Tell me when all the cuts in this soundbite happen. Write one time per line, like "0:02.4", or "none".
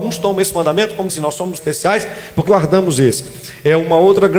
0:01.1
0:01.6
0:02.5